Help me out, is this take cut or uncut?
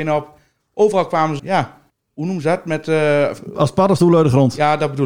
cut